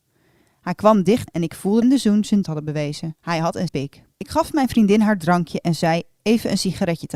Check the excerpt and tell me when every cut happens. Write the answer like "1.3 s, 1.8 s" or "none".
1.3 s, 1.8 s, 2.4 s, 3.2 s, 3.7 s, 4.1 s

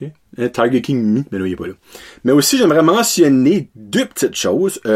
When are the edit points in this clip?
none

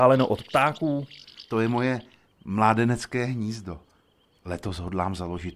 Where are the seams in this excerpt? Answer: 1.4 s

